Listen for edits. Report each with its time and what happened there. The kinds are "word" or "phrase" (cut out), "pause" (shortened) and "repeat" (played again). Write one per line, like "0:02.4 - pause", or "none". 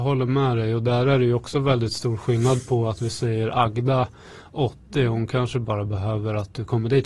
none